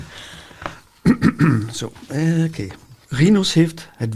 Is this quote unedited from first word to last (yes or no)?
no